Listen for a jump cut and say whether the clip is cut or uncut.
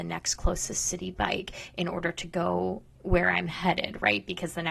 uncut